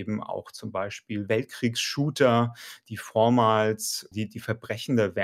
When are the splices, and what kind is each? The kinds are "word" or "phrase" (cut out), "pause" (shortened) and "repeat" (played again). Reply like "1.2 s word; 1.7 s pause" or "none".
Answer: 4.1 s word